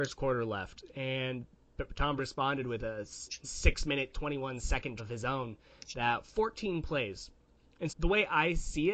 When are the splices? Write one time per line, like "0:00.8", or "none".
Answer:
0:02.2
0:03.4
0:05.0
0:07.9